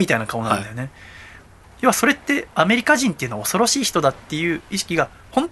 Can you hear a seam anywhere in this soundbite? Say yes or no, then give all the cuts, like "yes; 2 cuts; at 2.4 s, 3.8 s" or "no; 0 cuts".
no; 0 cuts